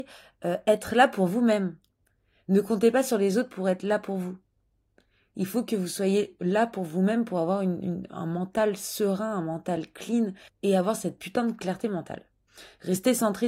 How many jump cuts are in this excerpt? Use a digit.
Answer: 0